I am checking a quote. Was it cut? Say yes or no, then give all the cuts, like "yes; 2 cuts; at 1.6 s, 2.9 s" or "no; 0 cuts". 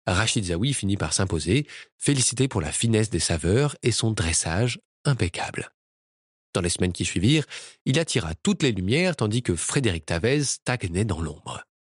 no; 0 cuts